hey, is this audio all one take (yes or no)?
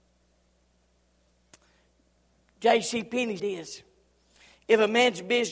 no